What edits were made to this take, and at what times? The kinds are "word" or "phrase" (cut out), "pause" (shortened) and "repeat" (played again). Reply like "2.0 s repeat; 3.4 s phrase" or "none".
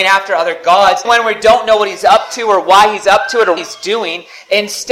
1.0 s word; 3.6 s word